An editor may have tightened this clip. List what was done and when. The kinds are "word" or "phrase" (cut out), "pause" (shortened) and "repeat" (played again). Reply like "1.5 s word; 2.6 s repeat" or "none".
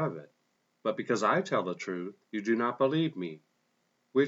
2.2 s pause